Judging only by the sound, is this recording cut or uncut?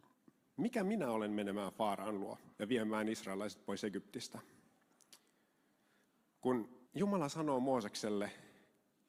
cut